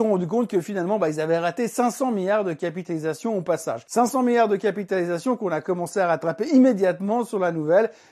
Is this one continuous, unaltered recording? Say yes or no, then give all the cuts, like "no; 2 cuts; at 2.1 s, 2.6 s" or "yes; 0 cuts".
yes; 0 cuts